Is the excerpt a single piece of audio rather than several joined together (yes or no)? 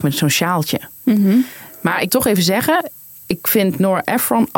no